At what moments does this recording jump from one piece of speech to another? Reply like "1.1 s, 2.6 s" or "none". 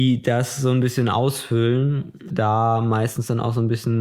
2.3 s

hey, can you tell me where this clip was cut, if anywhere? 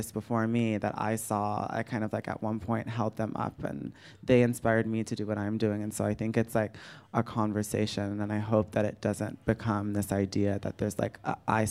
none

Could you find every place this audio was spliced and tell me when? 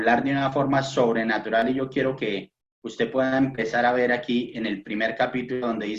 none

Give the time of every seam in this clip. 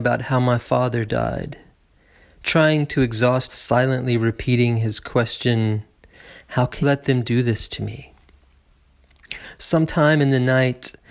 3.5 s, 6.8 s

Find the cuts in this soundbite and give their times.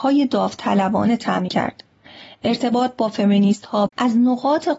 1.5 s, 3.9 s

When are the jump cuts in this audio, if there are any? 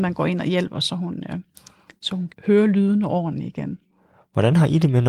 2.3 s

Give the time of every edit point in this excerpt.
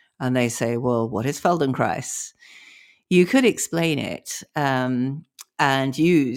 none

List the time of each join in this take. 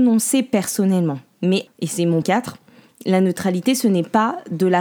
1.7 s, 2.2 s

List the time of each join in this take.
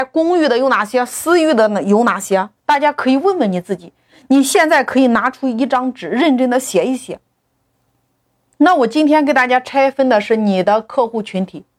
2.6 s, 7.7 s

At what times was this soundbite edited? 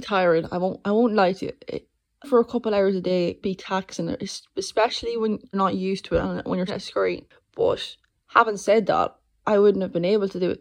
2.2 s, 3.4 s, 5.5 s, 6.7 s

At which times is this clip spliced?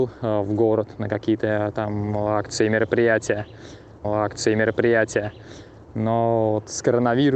4.0 s

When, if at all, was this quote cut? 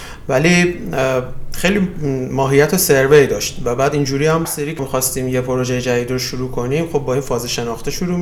4.4 s, 4.8 s

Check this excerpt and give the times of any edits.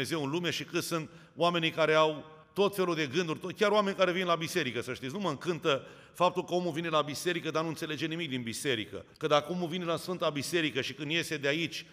2.4 s, 9.1 s

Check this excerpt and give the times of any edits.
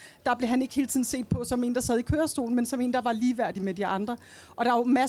none

